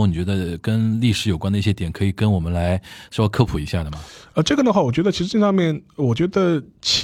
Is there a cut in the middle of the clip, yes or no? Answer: no